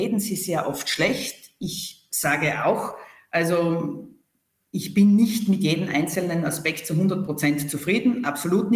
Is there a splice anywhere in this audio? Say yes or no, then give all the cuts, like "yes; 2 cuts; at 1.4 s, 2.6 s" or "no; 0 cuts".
no; 0 cuts